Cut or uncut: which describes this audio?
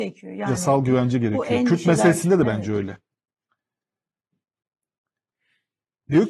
uncut